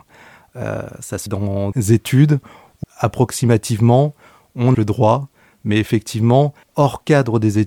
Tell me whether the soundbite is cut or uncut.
cut